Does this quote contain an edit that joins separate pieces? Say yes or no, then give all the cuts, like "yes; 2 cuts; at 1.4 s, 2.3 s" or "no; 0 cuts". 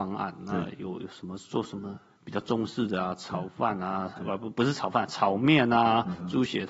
no; 0 cuts